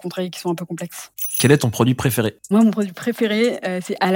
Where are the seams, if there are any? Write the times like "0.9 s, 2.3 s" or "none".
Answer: 2.5 s